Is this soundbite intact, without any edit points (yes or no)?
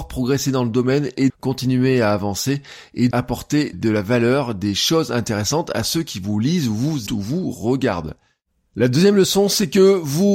no